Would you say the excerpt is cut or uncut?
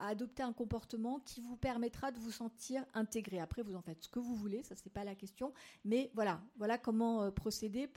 uncut